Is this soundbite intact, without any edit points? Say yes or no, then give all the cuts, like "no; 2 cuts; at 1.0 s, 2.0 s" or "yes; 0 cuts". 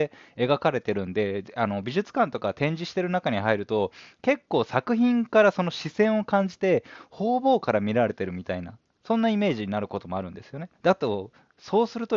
no; 1 cut; at 10.7 s